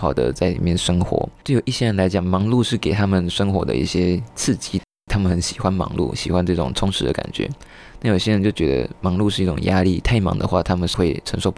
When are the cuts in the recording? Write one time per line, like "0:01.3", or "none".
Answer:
0:01.4